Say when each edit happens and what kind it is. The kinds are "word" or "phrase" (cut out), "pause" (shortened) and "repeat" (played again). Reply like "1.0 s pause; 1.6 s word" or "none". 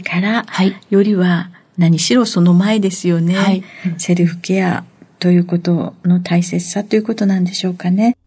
none